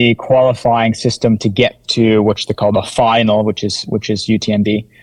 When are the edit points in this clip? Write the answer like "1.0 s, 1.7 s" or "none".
none